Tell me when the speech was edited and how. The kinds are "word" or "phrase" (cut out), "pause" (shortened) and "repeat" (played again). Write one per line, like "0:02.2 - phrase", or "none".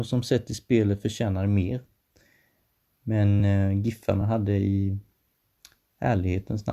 none